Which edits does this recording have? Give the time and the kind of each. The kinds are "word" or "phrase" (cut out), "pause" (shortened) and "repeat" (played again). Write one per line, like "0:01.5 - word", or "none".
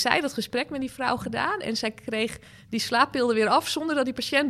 none